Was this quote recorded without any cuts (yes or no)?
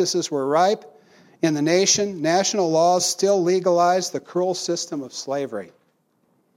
yes